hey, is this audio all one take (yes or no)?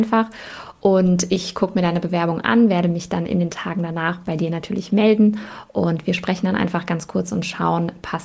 yes